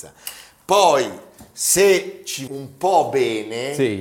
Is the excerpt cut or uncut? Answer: cut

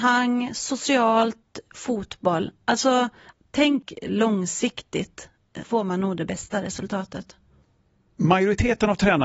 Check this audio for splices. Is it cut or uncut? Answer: cut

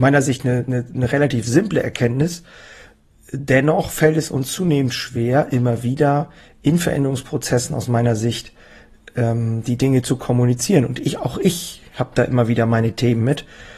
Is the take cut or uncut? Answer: uncut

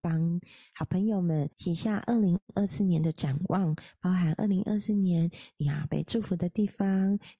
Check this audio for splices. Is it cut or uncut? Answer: cut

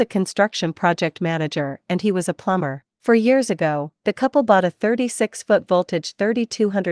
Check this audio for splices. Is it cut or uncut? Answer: cut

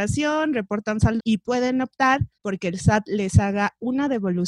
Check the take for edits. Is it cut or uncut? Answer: cut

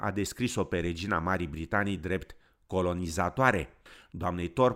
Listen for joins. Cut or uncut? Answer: uncut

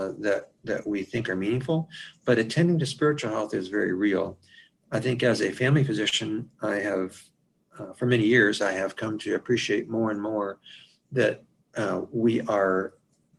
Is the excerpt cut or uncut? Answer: uncut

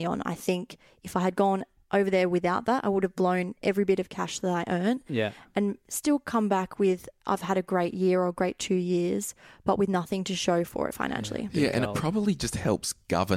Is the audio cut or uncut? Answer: uncut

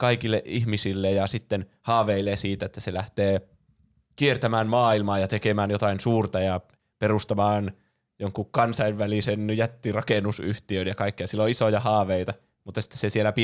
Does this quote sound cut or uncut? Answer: uncut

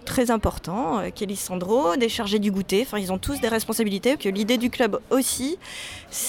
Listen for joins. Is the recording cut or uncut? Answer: cut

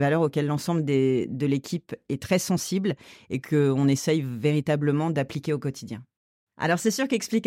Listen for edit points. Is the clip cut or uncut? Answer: uncut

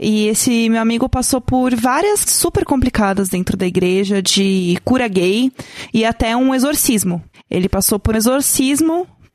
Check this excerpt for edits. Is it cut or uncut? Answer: cut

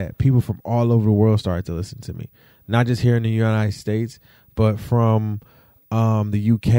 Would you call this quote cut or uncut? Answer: uncut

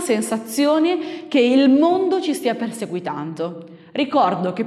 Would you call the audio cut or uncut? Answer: uncut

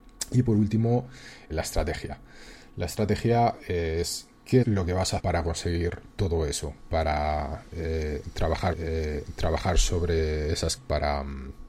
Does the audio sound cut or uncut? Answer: cut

